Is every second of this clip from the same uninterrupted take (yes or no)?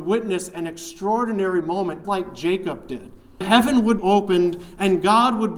no